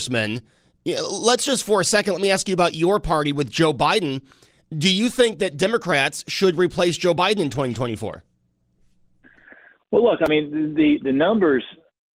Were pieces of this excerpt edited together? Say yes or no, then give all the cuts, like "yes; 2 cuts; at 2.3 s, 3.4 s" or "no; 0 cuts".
no; 0 cuts